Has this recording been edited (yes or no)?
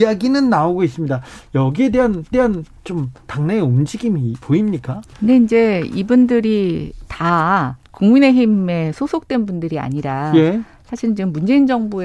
yes